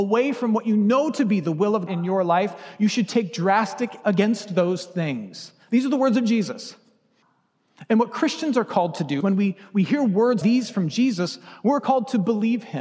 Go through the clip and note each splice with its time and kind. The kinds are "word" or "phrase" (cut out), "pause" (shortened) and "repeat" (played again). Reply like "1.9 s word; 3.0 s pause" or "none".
1.9 s word; 4.0 s word; 9.2 s word; 10.4 s word